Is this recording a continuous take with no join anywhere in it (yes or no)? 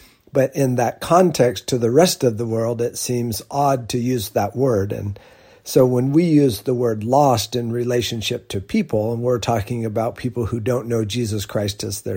yes